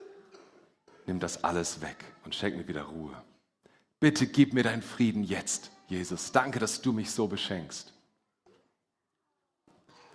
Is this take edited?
no; 0 cuts

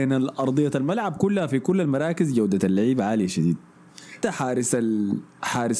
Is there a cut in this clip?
yes; 1 cut; at 4.2 s

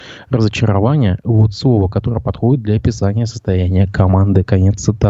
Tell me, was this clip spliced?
no; 0 cuts

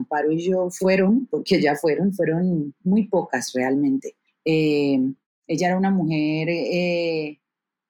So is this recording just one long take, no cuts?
yes; 0 cuts

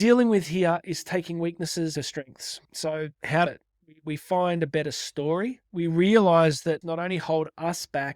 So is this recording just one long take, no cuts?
no; 4 cuts; at 1.9 s, 3.1 s, 3.5 s, 6.8 s

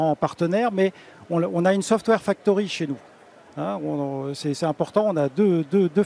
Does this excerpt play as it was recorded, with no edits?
yes; 0 cuts

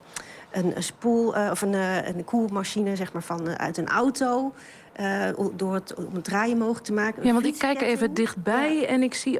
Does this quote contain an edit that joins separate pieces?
no; 0 cuts

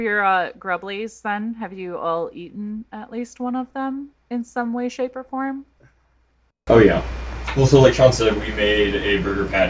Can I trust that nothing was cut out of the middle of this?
yes; 0 cuts

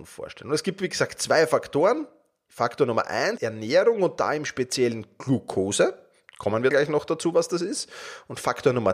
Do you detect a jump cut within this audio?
yes; 2 cuts; at 3.4 s, 6.7 s

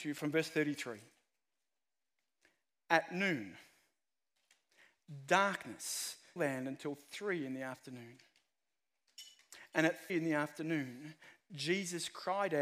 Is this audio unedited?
no; 2 cuts; at 6.4 s, 10.1 s

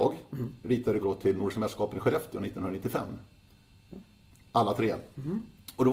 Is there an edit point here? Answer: yes; 1 cut; at 1.0 s

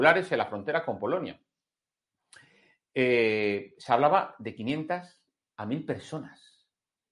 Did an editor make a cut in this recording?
no; 0 cuts

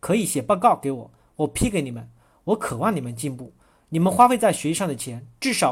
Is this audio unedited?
yes; 0 cuts

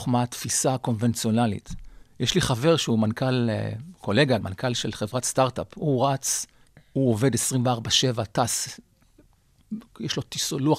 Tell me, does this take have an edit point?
yes; 3 cuts; at 2.0 s, 4.4 s, 6.6 s

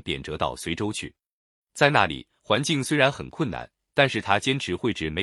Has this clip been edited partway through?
no; 0 cuts

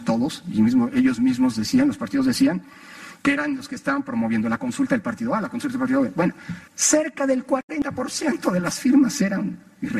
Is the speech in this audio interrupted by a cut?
yes; 1 cut; at 6.7 s

